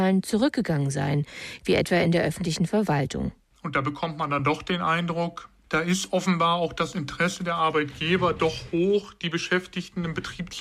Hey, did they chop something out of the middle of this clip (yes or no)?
no